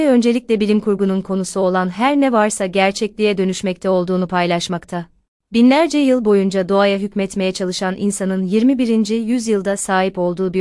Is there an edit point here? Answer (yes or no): no